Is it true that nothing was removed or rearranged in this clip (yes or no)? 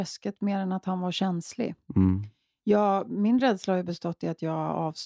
yes